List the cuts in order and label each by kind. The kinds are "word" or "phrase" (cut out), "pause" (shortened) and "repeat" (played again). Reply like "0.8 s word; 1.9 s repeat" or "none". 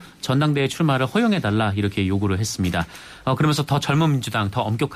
none